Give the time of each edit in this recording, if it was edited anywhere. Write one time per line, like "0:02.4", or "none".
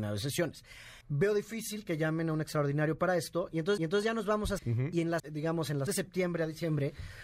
0:01.0
0:03.8
0:04.6
0:05.2
0:05.9